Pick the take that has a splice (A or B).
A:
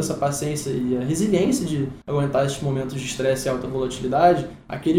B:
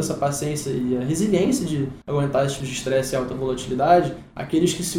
B